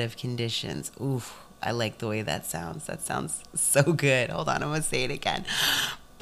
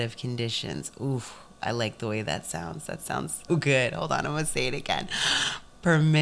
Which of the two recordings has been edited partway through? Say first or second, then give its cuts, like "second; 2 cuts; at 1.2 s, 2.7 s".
second; 1 cut; at 3.5 s